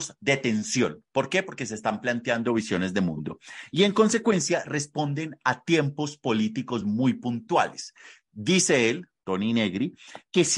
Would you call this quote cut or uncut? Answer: uncut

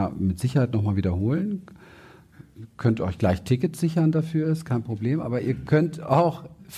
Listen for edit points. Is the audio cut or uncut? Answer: uncut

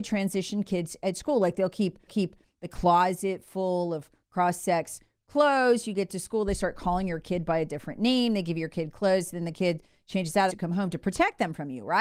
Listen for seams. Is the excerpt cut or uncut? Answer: cut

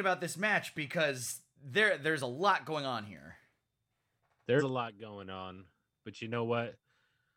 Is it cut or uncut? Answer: cut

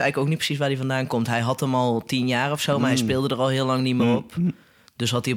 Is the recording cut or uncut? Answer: uncut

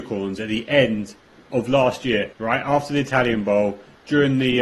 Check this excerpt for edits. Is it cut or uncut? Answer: cut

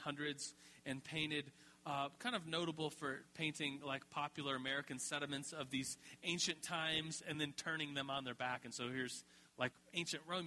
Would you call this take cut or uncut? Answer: uncut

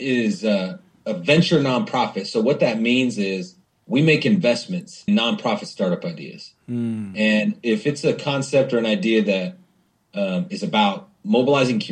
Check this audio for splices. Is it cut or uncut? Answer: cut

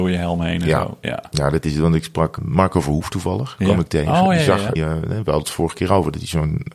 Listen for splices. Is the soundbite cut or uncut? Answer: cut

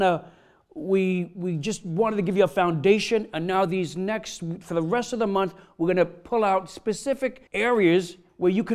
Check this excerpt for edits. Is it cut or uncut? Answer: cut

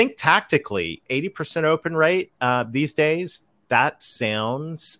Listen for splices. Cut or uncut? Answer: uncut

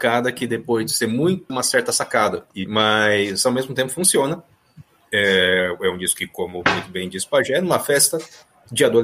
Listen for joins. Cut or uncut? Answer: cut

